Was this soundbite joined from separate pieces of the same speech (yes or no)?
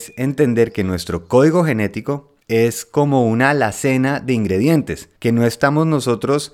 yes